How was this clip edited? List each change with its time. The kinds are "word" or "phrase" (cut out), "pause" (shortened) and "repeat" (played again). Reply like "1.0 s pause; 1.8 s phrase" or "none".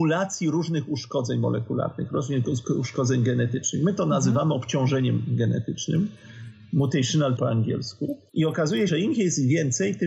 7.4 s phrase; 8.3 s pause; 8.9 s word